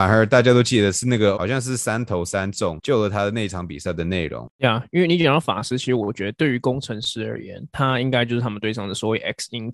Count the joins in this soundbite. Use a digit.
1